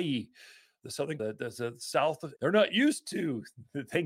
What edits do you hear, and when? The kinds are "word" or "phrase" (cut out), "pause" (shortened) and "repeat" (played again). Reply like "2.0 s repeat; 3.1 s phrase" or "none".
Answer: 1.2 s word; 2.4 s word